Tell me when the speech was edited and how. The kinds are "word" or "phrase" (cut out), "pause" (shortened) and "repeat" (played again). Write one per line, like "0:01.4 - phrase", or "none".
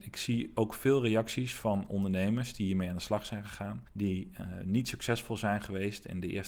0:03.9 - pause

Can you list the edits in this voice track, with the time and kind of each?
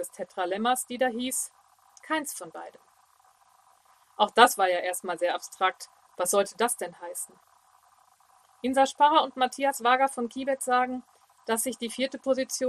none

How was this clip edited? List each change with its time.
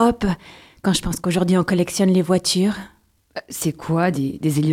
none

